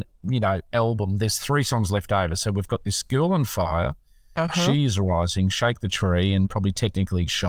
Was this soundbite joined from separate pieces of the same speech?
no; 0 cuts

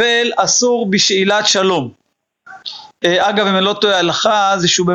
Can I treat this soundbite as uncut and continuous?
yes; 0 cuts

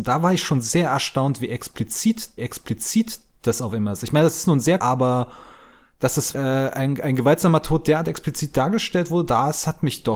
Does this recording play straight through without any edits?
no; 3 cuts; at 2.4 s, 4.8 s, 6.3 s

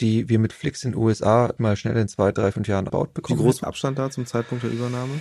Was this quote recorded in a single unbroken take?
no; 4 cuts; at 1.6 s, 2.5 s, 2.9 s, 3.6 s

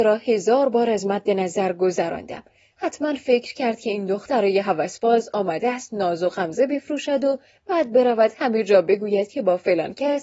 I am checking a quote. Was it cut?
no; 0 cuts

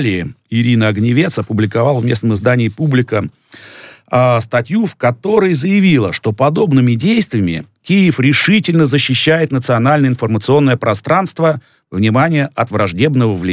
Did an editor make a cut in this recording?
no; 0 cuts

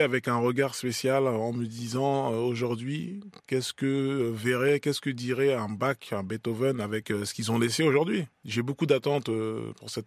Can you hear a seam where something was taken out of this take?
no; 0 cuts

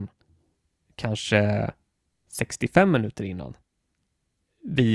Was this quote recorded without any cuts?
yes; 0 cuts

